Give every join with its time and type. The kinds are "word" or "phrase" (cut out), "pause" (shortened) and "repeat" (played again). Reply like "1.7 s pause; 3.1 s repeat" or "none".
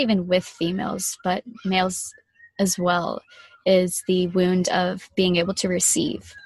none